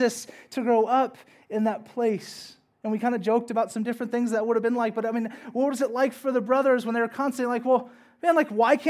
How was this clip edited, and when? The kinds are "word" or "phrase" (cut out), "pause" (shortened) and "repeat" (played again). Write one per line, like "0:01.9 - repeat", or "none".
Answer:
none